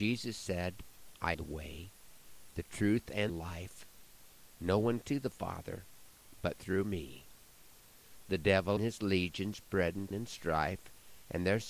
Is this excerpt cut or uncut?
cut